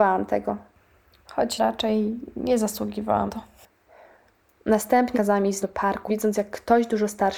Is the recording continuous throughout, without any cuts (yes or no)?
no